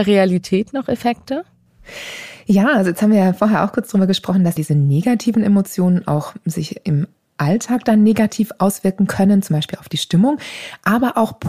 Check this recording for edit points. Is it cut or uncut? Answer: cut